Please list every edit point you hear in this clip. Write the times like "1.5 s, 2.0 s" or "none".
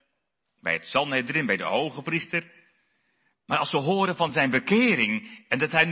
none